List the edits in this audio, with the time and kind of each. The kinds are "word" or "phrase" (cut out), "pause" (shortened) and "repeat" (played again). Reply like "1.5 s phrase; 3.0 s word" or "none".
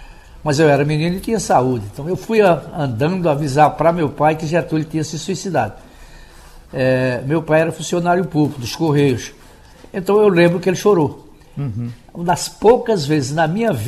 none